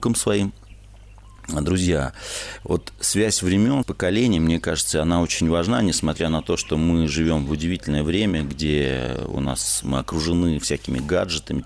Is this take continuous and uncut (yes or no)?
no